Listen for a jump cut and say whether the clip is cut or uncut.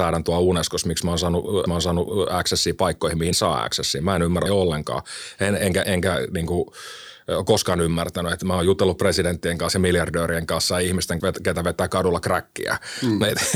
cut